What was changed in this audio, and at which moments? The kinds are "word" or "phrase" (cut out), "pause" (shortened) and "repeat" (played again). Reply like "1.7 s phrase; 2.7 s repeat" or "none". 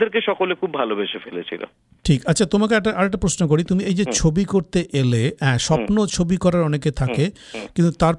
none